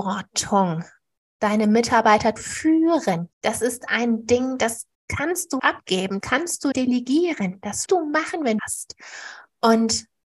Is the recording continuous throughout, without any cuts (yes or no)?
no